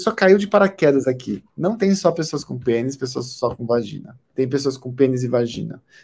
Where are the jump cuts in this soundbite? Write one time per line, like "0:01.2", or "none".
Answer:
0:01.5
0:04.2

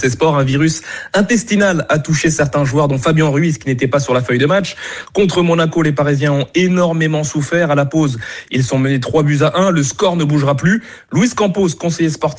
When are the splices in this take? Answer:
none

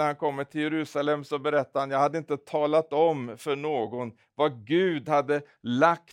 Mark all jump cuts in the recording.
none

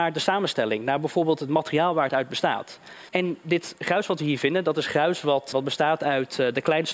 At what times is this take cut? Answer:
0:03.1
0:05.5

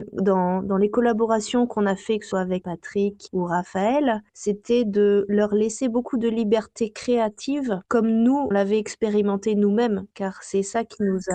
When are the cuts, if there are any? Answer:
0:02.3
0:02.6
0:03.3
0:04.3
0:07.8
0:08.5
0:10.1

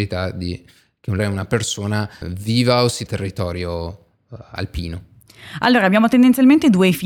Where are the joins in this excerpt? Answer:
0:01.2
0:02.2
0:03.1

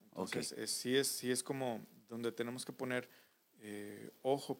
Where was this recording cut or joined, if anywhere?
none

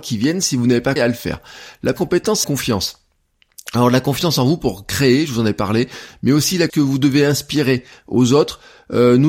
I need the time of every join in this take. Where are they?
0:01.0
0:02.0
0:02.4
0:06.7

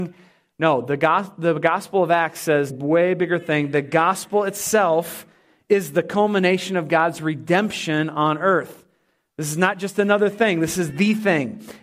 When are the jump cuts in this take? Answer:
0:02.7

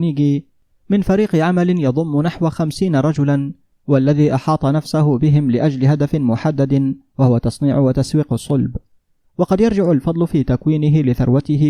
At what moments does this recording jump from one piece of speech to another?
none

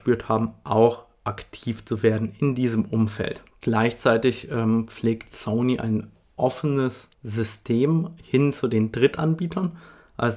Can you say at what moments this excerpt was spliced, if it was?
0:03.5
0:07.1

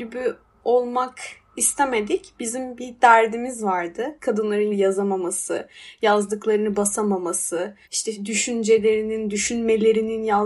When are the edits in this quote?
0:04.7
0:07.8

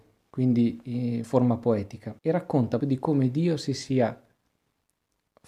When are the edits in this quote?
0:01.2
0:02.2
0:02.8

